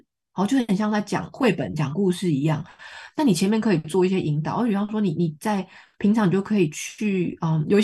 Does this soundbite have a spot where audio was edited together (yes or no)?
no